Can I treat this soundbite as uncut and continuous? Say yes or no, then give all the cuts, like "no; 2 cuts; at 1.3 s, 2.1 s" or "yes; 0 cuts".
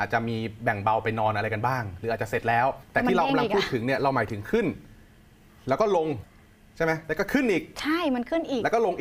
yes; 0 cuts